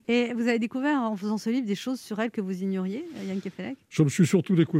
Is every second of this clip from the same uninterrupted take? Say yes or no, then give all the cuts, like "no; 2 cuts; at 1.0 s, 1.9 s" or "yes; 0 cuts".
yes; 0 cuts